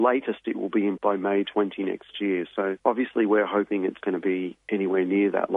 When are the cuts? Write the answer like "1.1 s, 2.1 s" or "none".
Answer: 1.0 s, 4.0 s

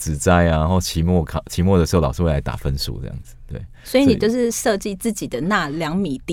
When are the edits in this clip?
none

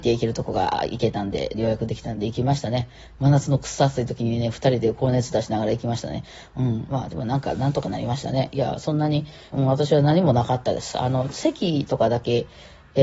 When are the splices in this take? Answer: 9.5 s

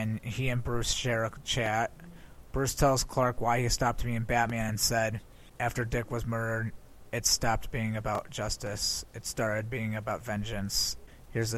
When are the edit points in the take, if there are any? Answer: none

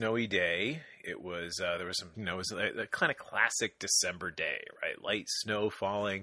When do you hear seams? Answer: 2.1 s

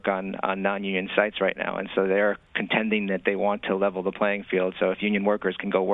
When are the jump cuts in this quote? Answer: none

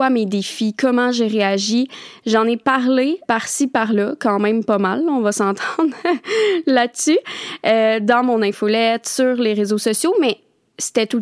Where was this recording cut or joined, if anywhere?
3.2 s

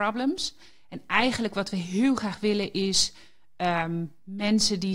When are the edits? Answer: none

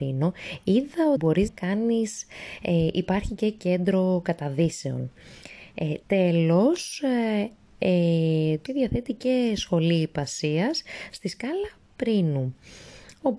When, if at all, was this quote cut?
1.2 s, 1.5 s, 6.0 s, 8.7 s

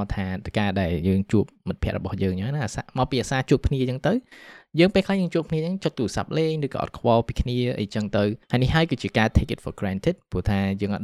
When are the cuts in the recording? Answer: none

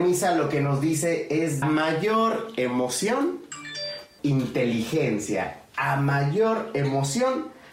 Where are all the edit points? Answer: 1.6 s, 4.2 s

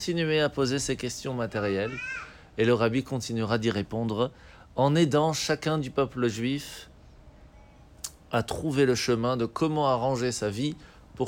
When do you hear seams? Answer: none

